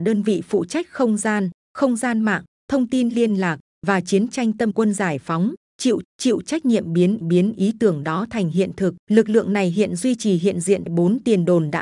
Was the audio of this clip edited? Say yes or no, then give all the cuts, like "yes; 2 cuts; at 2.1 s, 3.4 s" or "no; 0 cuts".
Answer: yes; 5 cuts; at 4.7 s, 6.0 s, 7.2 s, 9.0 s, 10.9 s